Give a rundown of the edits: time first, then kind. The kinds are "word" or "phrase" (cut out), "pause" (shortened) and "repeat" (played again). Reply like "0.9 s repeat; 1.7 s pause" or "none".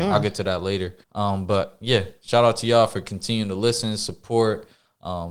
1.0 s pause